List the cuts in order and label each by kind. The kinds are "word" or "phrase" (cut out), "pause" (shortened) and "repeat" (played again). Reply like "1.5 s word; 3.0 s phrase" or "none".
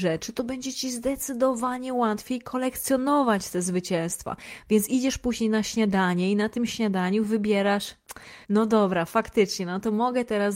8.4 s pause